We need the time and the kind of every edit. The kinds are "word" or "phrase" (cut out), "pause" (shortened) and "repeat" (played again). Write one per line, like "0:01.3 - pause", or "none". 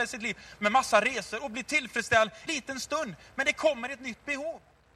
0:02.5 - word